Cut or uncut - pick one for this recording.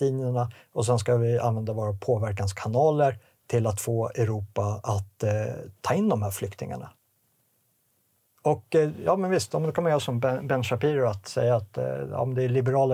uncut